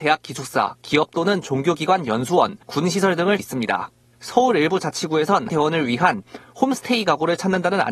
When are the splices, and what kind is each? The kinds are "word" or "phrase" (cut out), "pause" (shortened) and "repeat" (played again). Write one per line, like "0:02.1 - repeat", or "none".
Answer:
0:02.6 - pause
0:03.4 - word
0:05.5 - phrase

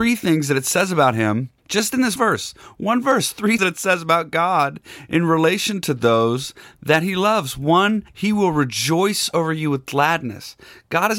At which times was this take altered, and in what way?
0:01.6 - pause
0:02.2 - word
0:03.6 - word
0:08.1 - pause

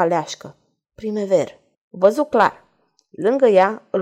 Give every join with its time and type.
0:01.7 - pause

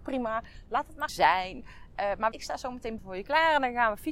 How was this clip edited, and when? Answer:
0:01.1 - word
0:02.3 - word
0:03.0 - word

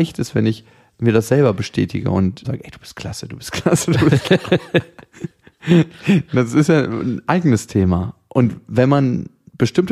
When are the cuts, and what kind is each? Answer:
0:02.4 - word
0:05.3 - pause

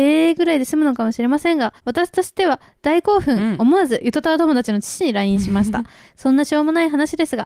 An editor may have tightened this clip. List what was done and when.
0:01.8 - pause

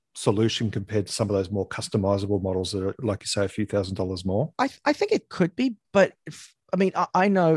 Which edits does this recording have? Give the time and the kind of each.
0:04.5 - pause
0:05.8 - pause
0:06.6 - pause

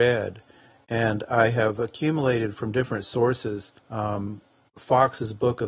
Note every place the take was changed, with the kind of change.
0:03.8 - pause

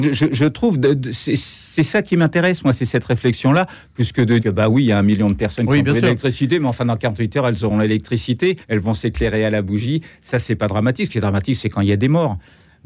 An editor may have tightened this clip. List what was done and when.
0:04.4 - word
0:08.6 - pause

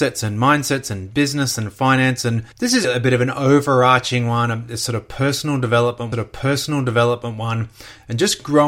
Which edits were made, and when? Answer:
0:02.5 - pause
0:02.8 - word
0:06.1 - repeat

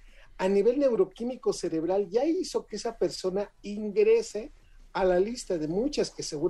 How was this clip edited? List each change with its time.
none

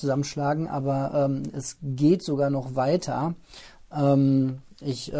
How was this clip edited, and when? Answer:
none

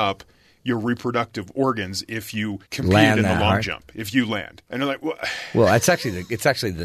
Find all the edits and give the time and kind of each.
0:02.7 - pause
0:04.7 - pause

